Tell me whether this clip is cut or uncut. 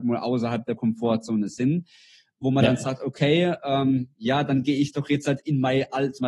uncut